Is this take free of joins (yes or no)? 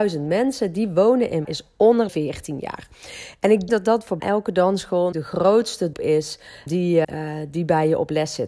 no